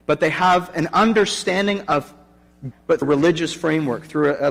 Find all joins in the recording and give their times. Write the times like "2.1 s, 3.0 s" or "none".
2.7 s, 3.0 s